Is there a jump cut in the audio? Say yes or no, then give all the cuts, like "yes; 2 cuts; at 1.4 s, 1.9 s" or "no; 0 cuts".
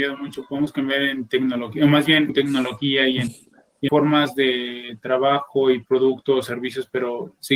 yes; 3 cuts; at 2.3 s, 3.3 s, 3.9 s